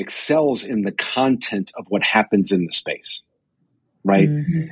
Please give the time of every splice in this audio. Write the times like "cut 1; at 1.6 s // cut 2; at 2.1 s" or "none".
none